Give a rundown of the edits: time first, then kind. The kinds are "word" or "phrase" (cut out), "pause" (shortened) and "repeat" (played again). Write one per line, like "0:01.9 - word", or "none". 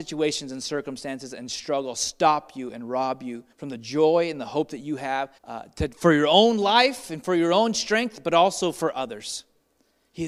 0:03.5 - pause
0:05.4 - pause

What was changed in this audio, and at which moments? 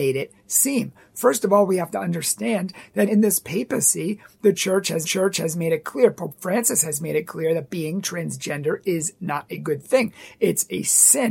0:03.1 - word
0:05.0 - repeat

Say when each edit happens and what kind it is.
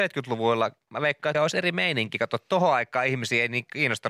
0:01.3 - word

